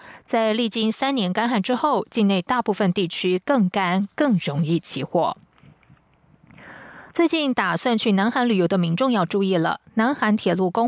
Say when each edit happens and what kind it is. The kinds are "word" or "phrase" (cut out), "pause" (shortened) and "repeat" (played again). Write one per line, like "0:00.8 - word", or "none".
0:07.1 - pause